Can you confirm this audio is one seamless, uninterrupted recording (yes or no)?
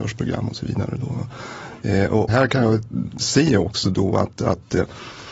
no